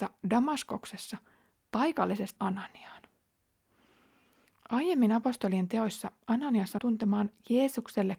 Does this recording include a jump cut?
yes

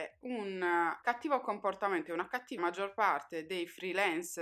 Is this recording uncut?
no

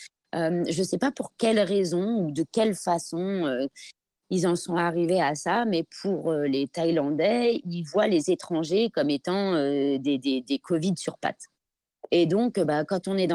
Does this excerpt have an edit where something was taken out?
no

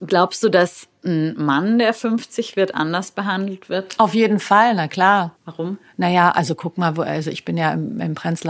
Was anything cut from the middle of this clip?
yes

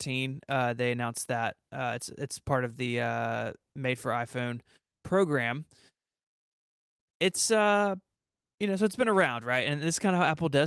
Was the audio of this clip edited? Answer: no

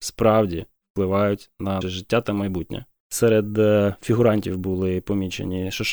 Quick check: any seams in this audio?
yes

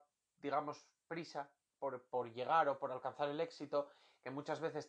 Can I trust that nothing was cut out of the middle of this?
yes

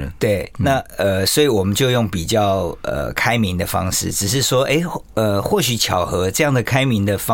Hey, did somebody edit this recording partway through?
no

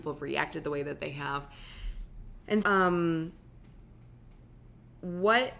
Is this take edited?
yes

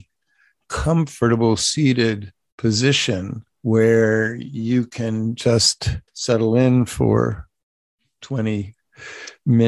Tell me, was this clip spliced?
yes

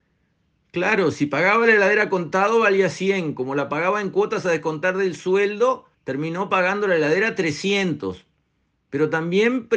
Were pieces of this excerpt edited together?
yes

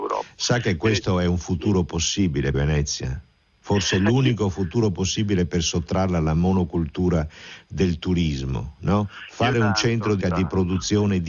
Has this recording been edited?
yes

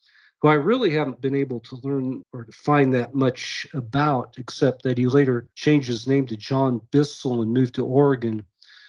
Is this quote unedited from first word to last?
no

